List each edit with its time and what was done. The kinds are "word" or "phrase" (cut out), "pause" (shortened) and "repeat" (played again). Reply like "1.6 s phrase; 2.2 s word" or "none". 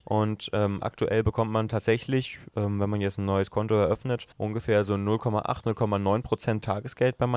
4.3 s pause